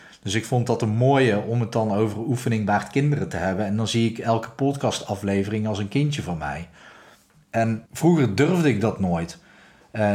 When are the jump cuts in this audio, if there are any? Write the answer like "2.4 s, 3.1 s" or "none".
7.9 s